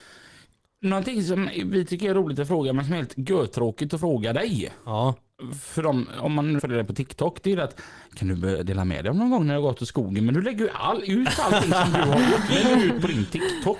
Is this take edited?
yes; 1 cut; at 6.6 s

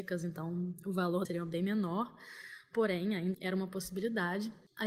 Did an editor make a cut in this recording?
yes; 2 cuts; at 1.2 s, 3.3 s

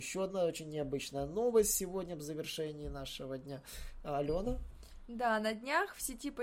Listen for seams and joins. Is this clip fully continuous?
yes; 0 cuts

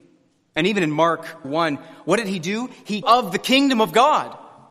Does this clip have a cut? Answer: yes; 2 cuts; at 1.4 s, 3.0 s

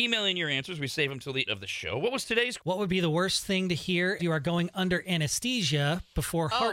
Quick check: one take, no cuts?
no; 3 cuts; at 1.5 s, 2.6 s, 4.2 s

